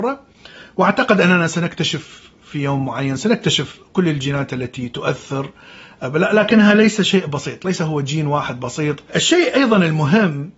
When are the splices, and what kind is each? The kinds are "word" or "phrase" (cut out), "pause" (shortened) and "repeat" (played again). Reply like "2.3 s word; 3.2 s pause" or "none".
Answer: none